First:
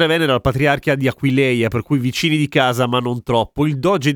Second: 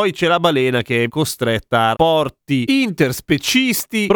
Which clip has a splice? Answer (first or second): second